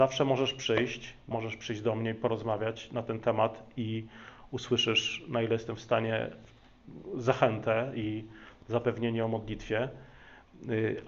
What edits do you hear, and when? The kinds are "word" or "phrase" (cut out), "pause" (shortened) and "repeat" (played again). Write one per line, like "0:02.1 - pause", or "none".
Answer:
0:01.3 - word

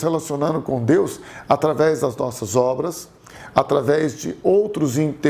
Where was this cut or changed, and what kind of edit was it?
none

